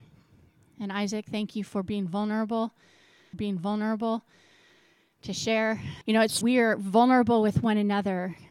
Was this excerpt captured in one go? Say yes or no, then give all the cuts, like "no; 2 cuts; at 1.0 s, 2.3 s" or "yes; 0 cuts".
no; 3 cuts; at 3.3 s, 6.0 s, 6.4 s